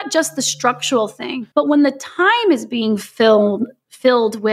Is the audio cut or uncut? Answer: cut